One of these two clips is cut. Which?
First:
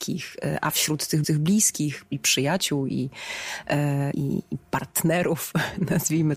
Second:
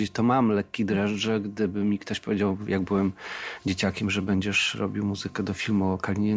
first; 2 cuts; at 1.2 s, 4.1 s

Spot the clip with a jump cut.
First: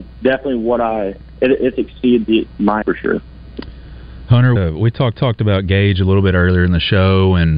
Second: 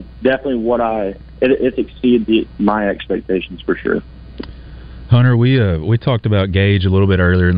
first; 3 cuts; at 2.8 s, 4.6 s, 5.1 s

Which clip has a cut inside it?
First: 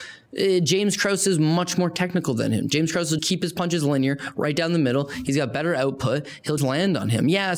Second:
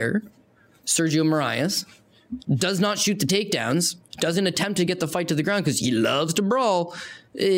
first; 2 cuts; at 3.2 s, 6.6 s

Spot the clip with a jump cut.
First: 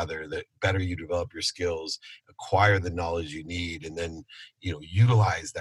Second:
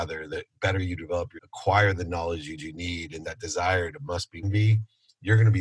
second; 4 cuts; at 1.4 s, 2.6 s, 3.2 s, 4.4 s

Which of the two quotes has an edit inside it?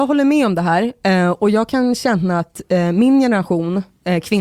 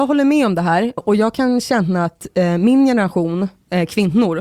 second; 1 cut; at 1.0 s

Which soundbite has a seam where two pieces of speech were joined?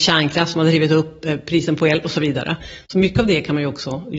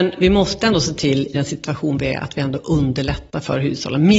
second; 1 cut; at 1.3 s

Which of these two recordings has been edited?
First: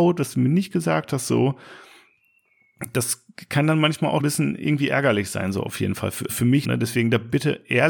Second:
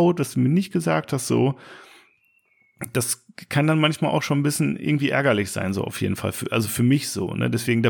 first; 3 cuts; at 4.2 s, 6.3 s, 6.6 s

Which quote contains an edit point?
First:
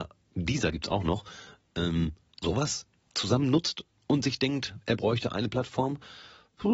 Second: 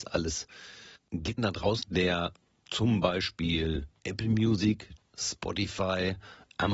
second; 5 cuts; at 1.0 s, 1.4 s, 1.8 s, 4.0 s, 5.0 s

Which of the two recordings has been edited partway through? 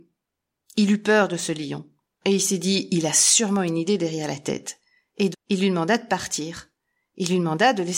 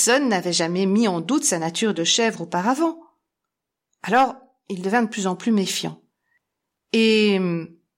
first; 1 cut; at 5.3 s

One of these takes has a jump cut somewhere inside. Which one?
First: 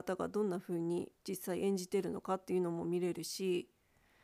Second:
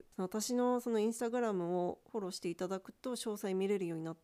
first; 1 cut; at 1.2 s

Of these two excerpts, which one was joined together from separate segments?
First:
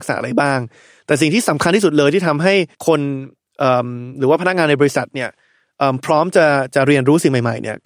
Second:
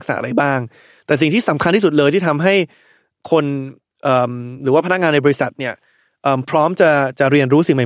first; 1 cut; at 2.7 s

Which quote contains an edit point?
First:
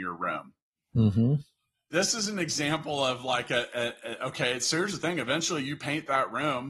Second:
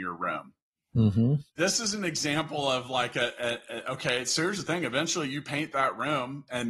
second; 1 cut; at 1.5 s

